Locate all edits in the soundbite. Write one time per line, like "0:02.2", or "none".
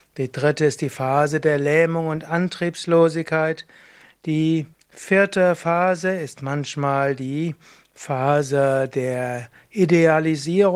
0:04.7

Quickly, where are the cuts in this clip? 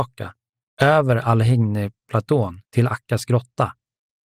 0:02.6

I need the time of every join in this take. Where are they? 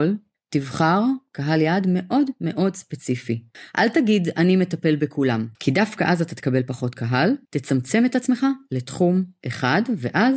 0:05.5
0:07.4

